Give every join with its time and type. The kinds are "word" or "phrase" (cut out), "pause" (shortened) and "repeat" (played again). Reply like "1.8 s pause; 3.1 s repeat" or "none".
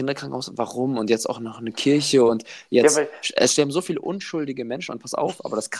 none